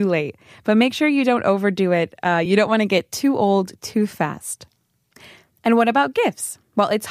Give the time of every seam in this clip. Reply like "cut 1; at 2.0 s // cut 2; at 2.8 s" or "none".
none